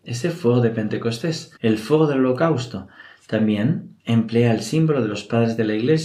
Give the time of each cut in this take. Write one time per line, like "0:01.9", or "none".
0:01.6
0:04.0